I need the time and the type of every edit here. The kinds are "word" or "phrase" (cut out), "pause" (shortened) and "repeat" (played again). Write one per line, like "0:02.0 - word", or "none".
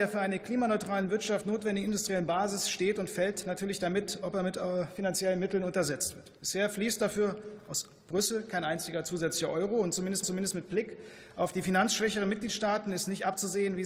0:06.4 - pause
0:10.2 - repeat